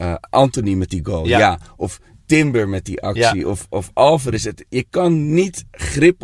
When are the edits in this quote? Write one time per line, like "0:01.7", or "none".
none